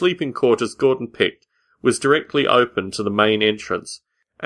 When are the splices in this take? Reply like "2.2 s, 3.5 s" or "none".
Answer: none